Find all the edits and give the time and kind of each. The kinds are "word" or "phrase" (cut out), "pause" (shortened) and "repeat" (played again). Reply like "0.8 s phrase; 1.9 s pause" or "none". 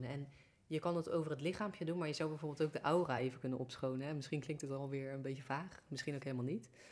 none